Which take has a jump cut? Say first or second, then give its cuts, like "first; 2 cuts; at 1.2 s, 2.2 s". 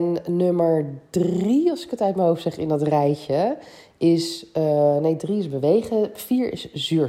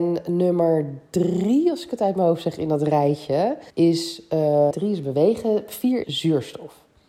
second; 3 cuts; at 3.7 s, 4.7 s, 6.0 s